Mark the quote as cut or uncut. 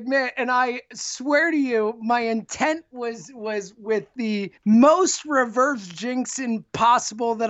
cut